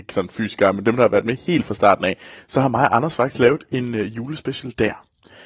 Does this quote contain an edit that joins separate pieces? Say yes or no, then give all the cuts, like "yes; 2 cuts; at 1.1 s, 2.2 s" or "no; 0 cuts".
no; 0 cuts